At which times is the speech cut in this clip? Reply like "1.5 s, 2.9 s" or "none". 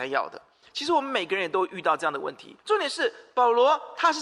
2.6 s